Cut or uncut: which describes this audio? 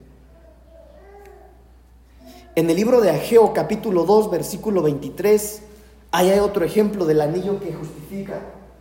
uncut